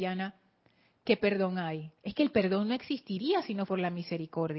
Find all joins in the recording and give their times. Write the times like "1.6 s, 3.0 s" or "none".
2.0 s, 3.7 s